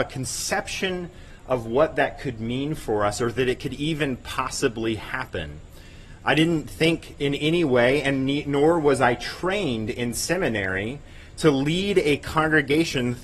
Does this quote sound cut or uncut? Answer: uncut